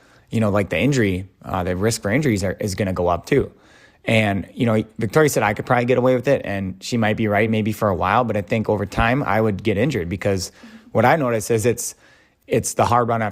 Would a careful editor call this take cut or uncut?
uncut